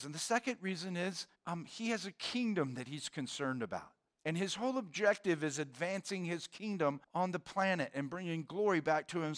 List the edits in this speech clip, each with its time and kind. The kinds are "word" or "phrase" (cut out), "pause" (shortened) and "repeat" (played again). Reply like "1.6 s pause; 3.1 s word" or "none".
1.4 s pause; 4.1 s pause; 7.0 s pause